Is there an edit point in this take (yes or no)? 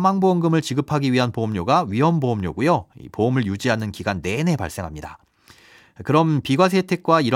no